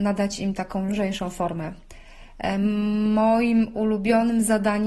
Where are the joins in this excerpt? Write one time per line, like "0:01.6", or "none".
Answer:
none